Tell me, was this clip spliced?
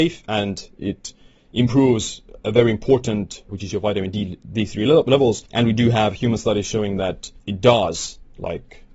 yes; 4 cuts; at 2.4 s, 3.5 s, 5.5 s, 7.4 s

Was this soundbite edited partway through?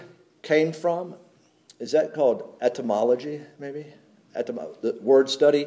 no; 0 cuts

